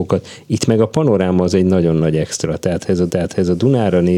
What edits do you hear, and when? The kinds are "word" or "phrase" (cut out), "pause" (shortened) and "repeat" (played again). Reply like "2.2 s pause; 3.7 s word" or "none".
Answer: 3.1 s repeat